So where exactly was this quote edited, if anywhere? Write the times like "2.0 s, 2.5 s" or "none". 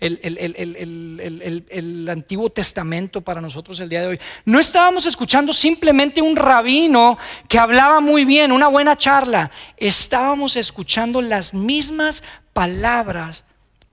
none